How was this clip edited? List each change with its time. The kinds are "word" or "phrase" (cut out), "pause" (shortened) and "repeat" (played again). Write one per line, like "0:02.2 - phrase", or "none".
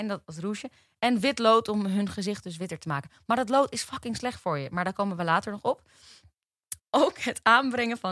0:06.8 - pause